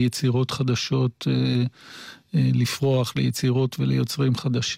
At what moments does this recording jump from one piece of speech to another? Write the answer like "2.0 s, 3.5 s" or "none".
none